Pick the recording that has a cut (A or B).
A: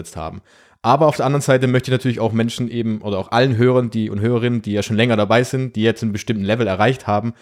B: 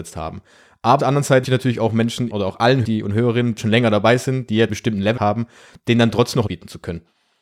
B